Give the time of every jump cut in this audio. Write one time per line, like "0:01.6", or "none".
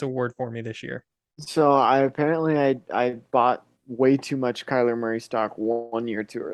none